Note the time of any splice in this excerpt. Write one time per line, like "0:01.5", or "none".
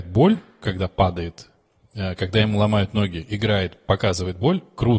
none